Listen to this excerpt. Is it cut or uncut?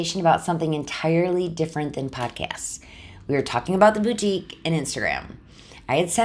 uncut